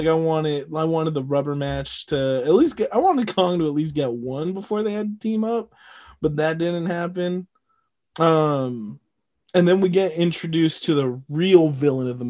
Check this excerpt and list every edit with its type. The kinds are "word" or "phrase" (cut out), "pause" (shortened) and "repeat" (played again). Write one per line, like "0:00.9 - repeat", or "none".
none